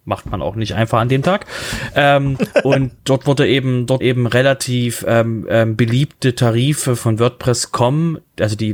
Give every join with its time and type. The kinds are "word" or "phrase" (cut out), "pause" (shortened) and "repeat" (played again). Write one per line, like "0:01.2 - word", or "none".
0:04.0 - word
0:07.0 - phrase